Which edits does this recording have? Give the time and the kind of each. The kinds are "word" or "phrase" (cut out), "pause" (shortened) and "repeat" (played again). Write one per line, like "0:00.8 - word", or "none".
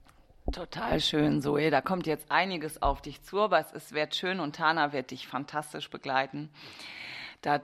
none